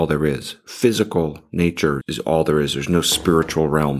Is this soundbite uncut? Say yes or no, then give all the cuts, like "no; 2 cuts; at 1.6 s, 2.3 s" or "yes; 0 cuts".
no; 1 cut; at 2.0 s